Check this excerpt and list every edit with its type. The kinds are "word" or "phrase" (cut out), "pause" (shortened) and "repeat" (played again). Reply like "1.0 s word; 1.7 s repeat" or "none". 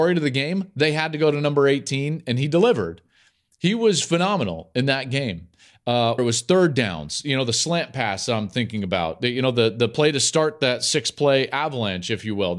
6.2 s word